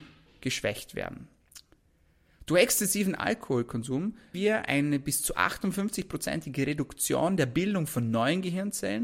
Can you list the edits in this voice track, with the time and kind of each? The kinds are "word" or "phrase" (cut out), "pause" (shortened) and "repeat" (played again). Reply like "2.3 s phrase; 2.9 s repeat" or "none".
4.3 s word